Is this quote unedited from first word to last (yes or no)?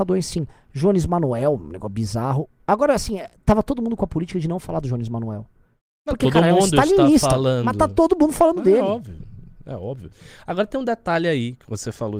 yes